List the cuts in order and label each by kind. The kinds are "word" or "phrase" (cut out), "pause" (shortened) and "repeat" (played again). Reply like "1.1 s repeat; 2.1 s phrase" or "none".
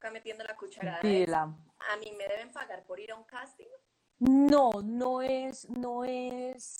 none